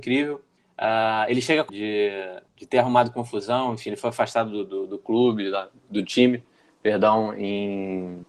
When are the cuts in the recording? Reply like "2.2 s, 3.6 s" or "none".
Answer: 1.7 s